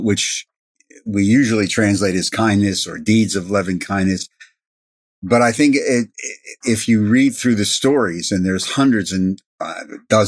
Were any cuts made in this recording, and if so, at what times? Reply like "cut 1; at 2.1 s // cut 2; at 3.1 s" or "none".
cut 1; at 6.6 s